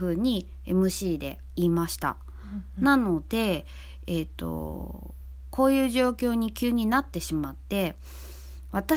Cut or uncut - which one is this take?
uncut